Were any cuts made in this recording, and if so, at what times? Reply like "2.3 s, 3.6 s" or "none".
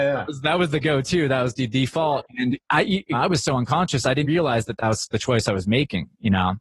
3.1 s, 4.2 s